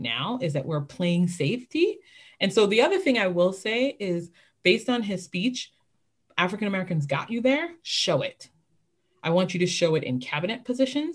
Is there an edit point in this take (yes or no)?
no